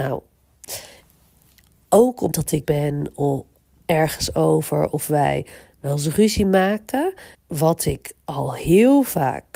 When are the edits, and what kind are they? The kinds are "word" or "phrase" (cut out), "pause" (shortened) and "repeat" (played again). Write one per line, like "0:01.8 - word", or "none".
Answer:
0:02.3 - word
0:02.6 - word
0:07.3 - word